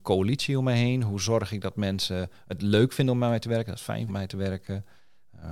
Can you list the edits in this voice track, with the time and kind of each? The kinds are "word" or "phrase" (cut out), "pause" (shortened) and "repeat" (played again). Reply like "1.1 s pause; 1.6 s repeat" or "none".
4.1 s word